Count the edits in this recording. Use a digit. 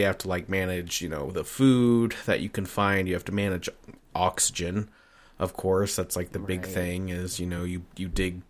0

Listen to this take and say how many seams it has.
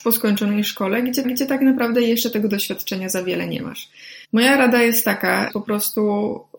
3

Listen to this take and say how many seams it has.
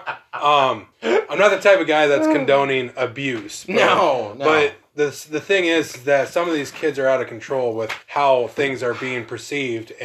2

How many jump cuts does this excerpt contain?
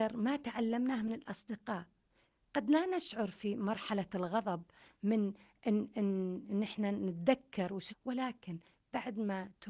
1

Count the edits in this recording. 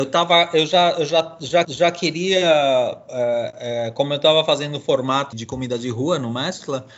2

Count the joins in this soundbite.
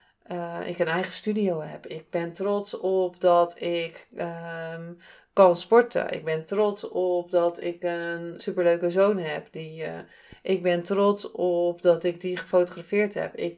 1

